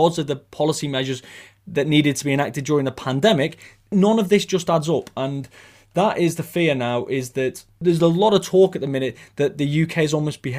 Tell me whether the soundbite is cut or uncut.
uncut